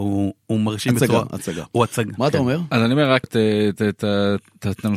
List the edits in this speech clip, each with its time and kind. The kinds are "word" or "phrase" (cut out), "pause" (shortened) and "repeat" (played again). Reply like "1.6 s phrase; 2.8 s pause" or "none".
3.2 s word